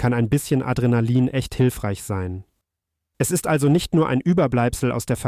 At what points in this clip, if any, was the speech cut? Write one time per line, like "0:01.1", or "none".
none